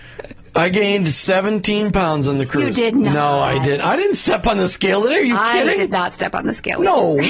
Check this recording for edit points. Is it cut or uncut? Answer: uncut